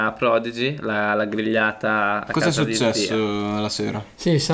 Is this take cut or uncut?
uncut